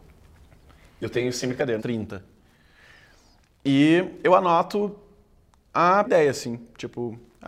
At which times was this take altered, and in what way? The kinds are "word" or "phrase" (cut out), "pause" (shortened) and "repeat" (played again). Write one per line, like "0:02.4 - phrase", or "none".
0:01.8 - word
0:06.0 - word